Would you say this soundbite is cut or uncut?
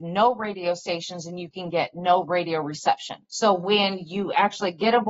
cut